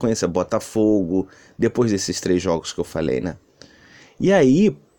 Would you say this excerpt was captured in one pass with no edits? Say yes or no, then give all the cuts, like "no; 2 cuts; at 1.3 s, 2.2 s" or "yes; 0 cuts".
yes; 0 cuts